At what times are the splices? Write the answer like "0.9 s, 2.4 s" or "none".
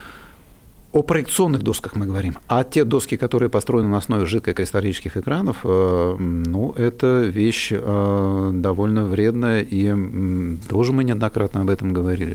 none